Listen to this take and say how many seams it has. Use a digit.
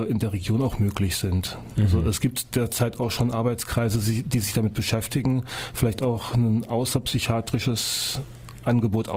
0